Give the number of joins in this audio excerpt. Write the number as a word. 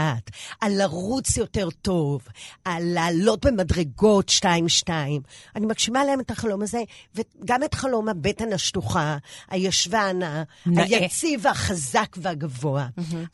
zero